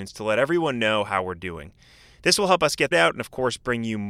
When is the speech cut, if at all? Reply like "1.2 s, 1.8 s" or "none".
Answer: 2.9 s